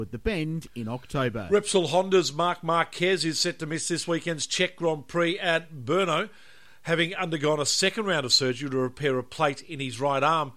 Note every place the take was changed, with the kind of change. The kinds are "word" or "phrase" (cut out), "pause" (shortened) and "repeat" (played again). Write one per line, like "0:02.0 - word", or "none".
none